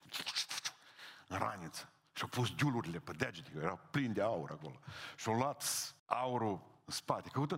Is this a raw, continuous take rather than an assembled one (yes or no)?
no